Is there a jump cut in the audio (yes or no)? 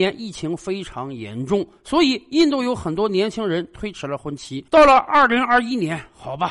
yes